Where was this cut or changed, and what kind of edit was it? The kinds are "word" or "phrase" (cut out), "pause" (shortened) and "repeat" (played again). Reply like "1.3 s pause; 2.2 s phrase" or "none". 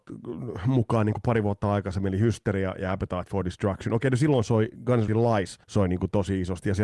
5.1 s word; 5.6 s pause